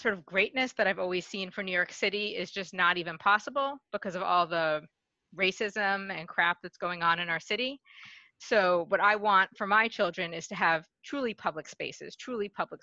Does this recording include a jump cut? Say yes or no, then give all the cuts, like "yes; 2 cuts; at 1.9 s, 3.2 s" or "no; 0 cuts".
no; 0 cuts